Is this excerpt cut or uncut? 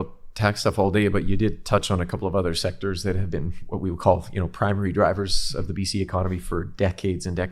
uncut